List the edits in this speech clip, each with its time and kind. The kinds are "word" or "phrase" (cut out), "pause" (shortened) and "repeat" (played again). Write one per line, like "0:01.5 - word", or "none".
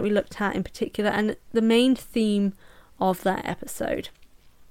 none